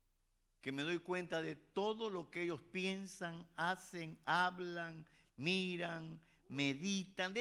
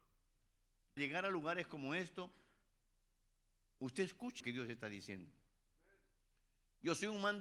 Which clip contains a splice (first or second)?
second